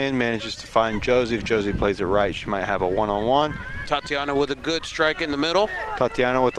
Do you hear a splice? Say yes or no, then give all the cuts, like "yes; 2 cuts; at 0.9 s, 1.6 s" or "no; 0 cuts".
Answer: no; 0 cuts